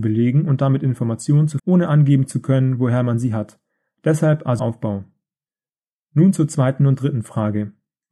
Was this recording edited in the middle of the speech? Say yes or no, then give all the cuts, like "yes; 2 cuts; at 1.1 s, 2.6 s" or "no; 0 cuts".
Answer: yes; 2 cuts; at 1.6 s, 4.6 s